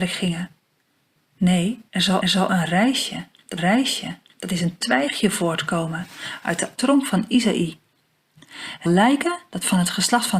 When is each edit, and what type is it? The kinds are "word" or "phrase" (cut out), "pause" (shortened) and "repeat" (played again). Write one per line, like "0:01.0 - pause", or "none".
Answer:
0:01.9 - pause
0:02.2 - repeat
0:03.6 - repeat
0:06.8 - word
0:08.9 - word